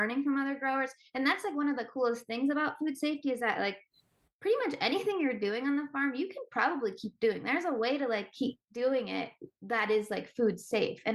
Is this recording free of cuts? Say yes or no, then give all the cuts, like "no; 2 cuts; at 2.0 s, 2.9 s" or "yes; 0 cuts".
yes; 0 cuts